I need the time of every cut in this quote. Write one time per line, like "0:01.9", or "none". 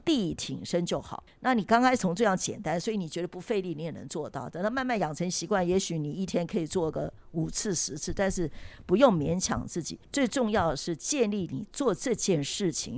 0:01.3
0:10.0